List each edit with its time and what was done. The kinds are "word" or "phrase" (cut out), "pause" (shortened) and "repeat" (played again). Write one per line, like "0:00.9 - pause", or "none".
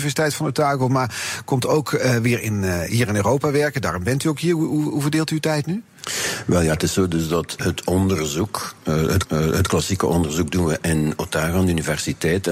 0:07.6 - word
0:09.2 - repeat